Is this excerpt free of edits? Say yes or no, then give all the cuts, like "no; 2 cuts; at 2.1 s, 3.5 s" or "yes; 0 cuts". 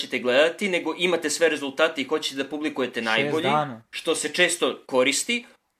no; 1 cut; at 3.9 s